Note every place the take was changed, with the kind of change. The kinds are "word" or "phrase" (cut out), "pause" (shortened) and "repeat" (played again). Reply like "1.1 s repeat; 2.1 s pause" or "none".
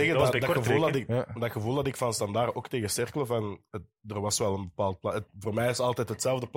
5.3 s pause